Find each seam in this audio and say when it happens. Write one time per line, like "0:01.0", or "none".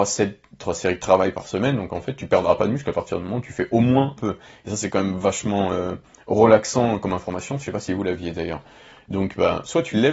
0:04.2